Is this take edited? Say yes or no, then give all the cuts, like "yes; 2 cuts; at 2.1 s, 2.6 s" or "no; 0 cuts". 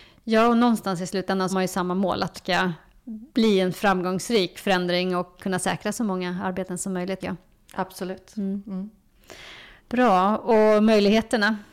yes; 6 cuts; at 1.5 s, 2.3 s, 3.3 s, 5.4 s, 7.2 s, 9.8 s